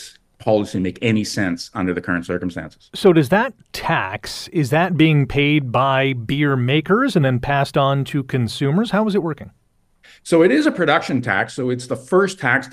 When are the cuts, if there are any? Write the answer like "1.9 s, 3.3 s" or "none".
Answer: none